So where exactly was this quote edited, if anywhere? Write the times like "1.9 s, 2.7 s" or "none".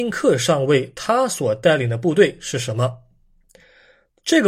none